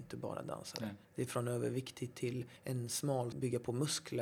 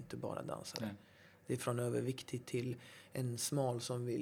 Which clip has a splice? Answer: first; 3 cuts; at 1.0 s, 2.6 s, 3.3 s

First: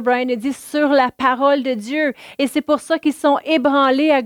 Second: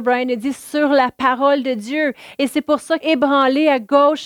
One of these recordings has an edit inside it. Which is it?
second; 1 cut; at 3.0 s

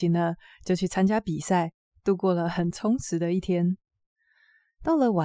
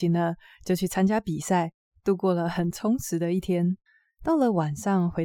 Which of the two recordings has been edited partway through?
second; 1 cut; at 3.9 s

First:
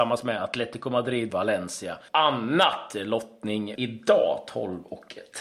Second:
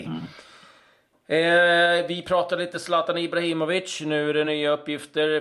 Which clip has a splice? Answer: first; 3 cuts; at 1.3 s, 2.1 s, 3.8 s

